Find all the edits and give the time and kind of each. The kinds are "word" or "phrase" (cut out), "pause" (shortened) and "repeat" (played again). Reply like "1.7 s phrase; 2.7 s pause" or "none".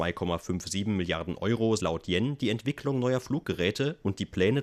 1.8 s word